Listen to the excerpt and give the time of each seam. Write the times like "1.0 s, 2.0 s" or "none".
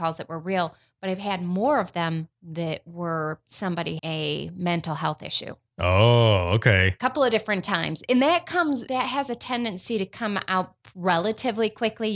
4.0 s, 8.9 s